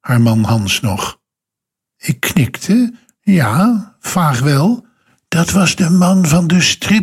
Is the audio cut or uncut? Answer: uncut